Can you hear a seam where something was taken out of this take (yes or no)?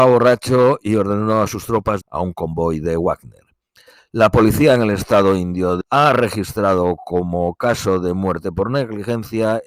yes